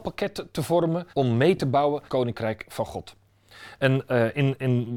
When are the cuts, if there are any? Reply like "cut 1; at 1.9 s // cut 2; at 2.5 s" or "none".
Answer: cut 1; at 1.1 s // cut 2; at 2.1 s